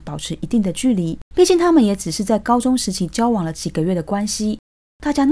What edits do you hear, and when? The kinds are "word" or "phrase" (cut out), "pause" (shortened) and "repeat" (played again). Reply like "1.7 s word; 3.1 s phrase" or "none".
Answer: 1.2 s pause